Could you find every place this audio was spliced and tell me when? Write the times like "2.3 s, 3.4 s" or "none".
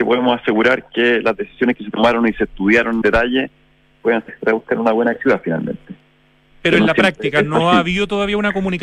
3.0 s, 4.3 s, 5.2 s